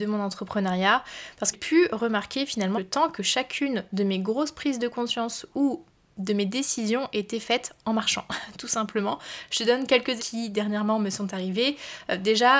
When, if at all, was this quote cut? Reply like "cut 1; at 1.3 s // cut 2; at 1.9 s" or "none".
cut 1; at 1.5 s // cut 2; at 2.7 s // cut 3; at 10.2 s